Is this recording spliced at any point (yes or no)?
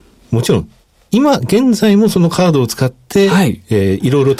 no